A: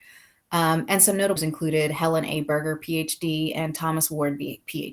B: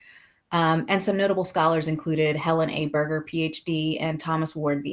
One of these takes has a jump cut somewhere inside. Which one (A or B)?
A